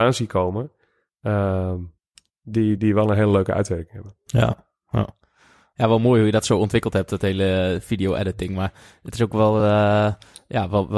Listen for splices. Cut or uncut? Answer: uncut